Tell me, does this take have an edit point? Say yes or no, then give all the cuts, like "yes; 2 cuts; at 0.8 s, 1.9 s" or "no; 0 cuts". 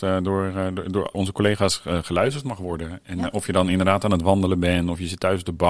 yes; 1 cut; at 1.1 s